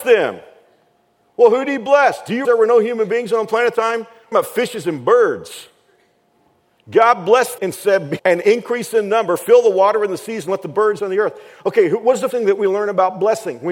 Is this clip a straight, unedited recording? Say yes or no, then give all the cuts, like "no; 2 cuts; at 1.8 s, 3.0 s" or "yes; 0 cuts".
no; 7 cuts; at 2.4 s, 3.7 s, 4.3 s, 7.6 s, 8.2 s, 11.0 s, 12.3 s